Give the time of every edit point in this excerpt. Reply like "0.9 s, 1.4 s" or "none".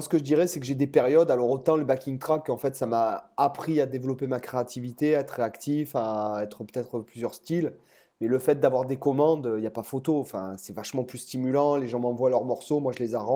none